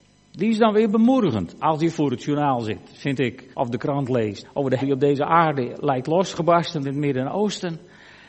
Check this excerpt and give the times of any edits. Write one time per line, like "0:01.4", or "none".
0:03.5
0:04.4
0:04.8
0:06.8

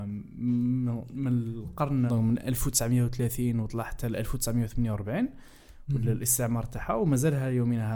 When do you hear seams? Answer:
0:02.1

